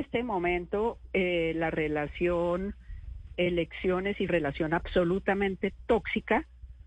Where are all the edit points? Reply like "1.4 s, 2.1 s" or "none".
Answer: 3.3 s, 4.3 s